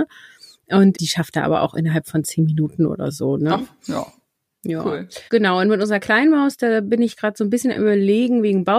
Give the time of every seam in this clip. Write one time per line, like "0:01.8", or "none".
0:00.9
0:05.3